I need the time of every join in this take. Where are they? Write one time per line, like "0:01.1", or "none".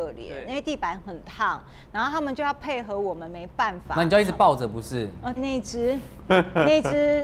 0:05.4

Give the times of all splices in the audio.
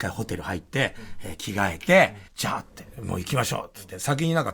0:02.3

